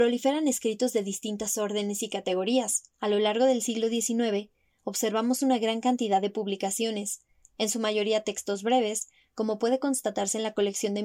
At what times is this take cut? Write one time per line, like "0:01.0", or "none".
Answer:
0:02.9